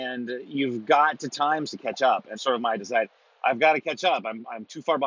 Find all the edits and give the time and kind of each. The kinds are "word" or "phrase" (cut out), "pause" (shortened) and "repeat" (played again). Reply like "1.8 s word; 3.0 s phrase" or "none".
1.3 s word; 1.7 s word; 2.3 s word; 2.8 s word